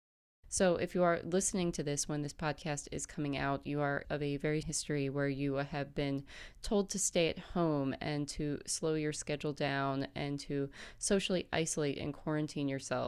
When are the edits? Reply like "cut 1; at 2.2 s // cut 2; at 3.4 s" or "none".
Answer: cut 1; at 4.0 s // cut 2; at 4.6 s